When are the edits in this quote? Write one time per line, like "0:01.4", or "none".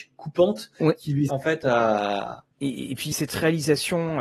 0:01.3
0:02.5
0:03.1